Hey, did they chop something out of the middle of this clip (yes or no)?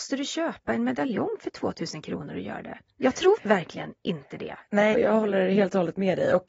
yes